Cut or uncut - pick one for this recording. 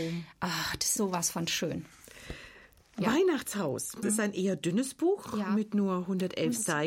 cut